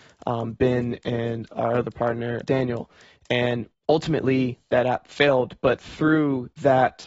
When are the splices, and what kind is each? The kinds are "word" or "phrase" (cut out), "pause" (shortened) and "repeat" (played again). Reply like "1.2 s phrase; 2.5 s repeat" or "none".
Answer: 2.4 s word